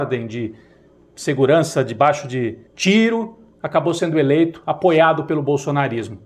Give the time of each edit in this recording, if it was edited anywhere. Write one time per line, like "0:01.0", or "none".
0:02.7